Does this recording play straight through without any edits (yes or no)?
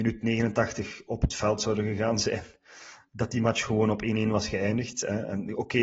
yes